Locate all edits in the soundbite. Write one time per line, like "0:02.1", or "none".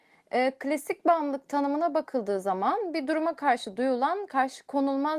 none